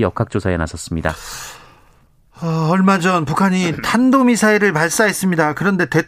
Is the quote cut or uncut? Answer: uncut